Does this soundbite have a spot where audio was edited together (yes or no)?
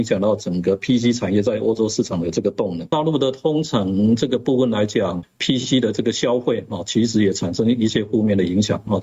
yes